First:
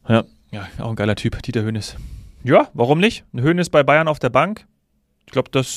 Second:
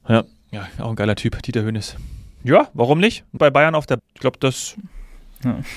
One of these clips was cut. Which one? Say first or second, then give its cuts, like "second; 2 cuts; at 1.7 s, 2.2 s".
second; 2 cuts; at 3.4 s, 4.0 s